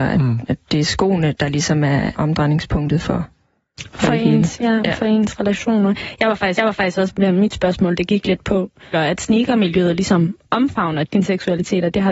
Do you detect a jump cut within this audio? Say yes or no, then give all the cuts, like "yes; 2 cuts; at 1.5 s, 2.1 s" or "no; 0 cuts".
yes; 5 cuts; at 2.1 s, 6.6 s, 7.2 s, 8.9 s, 11.0 s